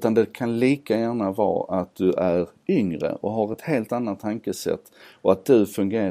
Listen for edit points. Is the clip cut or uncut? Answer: uncut